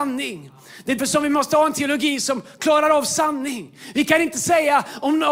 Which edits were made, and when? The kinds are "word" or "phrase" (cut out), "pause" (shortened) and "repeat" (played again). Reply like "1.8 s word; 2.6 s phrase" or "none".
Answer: 1.0 s word